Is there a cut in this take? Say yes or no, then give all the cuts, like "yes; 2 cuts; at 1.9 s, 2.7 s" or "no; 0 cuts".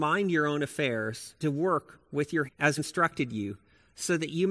yes; 3 cuts; at 1.4 s, 2.5 s, 2.8 s